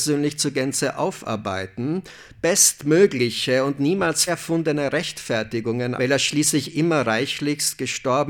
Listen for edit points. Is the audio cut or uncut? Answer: cut